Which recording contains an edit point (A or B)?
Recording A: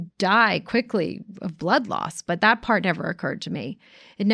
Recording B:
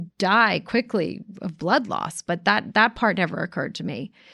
A